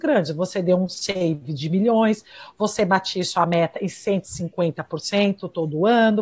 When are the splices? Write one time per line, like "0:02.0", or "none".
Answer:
none